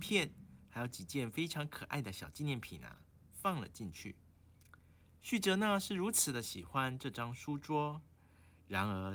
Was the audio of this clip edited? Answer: no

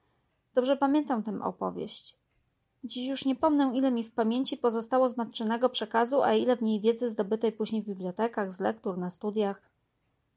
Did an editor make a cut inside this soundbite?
no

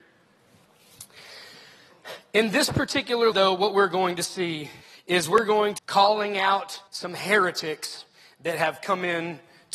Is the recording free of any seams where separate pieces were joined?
no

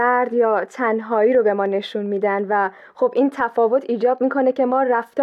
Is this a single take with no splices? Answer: yes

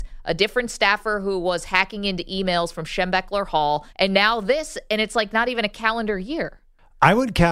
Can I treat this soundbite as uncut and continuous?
no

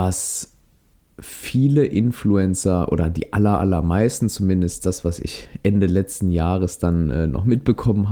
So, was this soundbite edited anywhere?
no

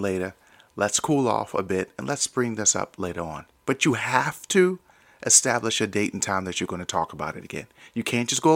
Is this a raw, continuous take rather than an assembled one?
yes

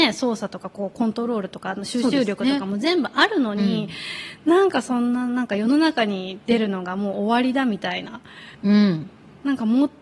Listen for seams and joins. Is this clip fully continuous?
no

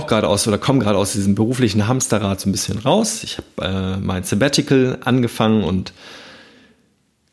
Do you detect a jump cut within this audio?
no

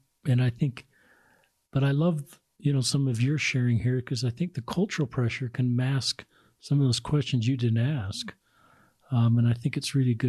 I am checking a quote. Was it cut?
no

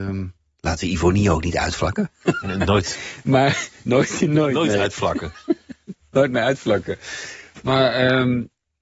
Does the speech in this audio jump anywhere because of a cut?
no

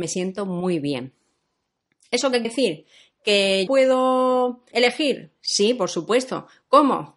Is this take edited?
yes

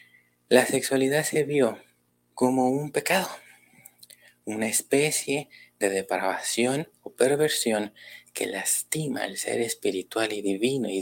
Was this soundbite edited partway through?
yes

